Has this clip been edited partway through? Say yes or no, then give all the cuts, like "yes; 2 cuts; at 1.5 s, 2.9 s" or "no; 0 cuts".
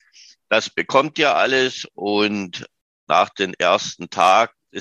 no; 0 cuts